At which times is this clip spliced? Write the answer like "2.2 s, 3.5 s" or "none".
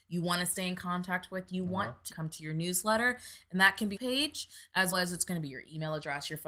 2.1 s, 4.0 s, 4.9 s